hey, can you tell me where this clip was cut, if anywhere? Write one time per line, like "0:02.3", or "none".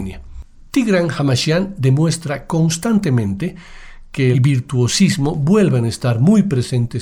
0:04.3